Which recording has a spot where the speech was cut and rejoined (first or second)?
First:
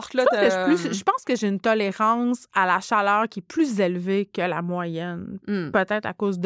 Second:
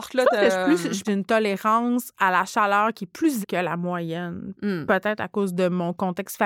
second